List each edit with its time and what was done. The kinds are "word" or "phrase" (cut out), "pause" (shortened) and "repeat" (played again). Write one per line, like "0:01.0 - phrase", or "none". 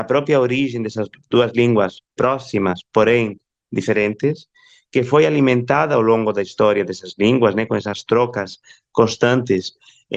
none

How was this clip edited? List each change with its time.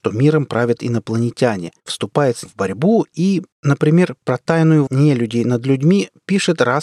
0:01.8 - pause
0:02.5 - word
0:03.5 - pause
0:04.9 - word

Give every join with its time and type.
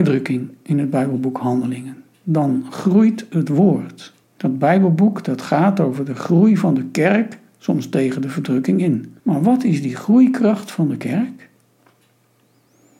0:04.2 - pause
0:09.2 - pause

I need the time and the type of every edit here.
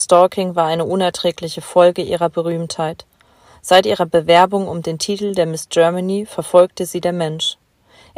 none

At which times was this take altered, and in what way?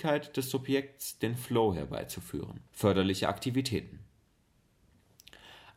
0:02.7 - pause

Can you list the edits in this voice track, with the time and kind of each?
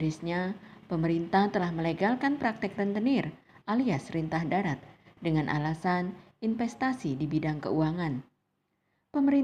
none

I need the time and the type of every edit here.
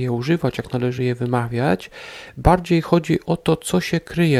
none

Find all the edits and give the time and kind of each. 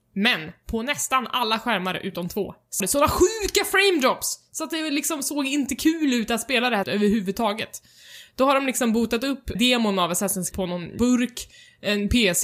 0:02.8 - word
0:06.8 - word
0:09.5 - word
0:10.5 - word
0:11.0 - word

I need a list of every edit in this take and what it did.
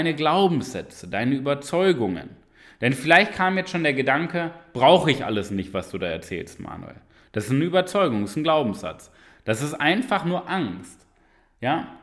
none

